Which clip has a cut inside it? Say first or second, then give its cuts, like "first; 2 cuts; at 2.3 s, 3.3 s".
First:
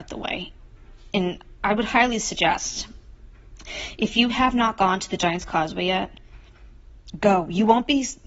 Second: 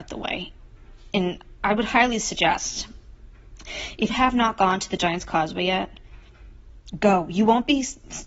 second; 1 cut; at 4.1 s